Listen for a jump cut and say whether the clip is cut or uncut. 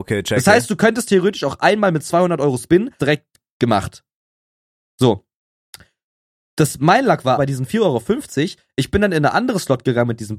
cut